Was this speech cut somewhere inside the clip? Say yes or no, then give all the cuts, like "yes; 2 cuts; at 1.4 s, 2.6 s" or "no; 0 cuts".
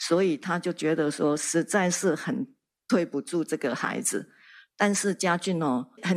no; 0 cuts